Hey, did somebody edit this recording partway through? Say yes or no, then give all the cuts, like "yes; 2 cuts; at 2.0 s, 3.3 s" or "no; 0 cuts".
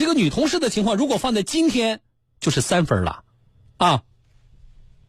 yes; 2 cuts; at 2.3 s, 3.5 s